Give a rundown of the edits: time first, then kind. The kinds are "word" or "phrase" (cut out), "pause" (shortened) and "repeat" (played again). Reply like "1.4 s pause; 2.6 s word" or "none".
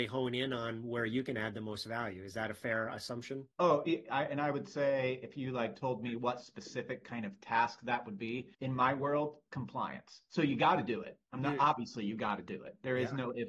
3.5 s pause; 8.5 s pause; 11.3 s pause